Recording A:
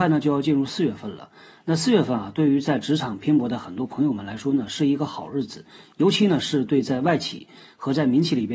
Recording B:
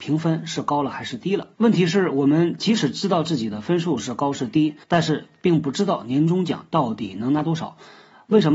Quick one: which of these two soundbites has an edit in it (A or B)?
B